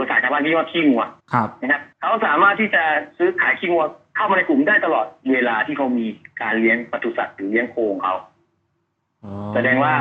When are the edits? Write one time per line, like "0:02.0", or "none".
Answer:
0:01.2
0:01.9